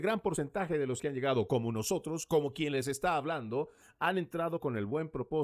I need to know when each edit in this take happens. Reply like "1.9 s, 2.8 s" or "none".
1.0 s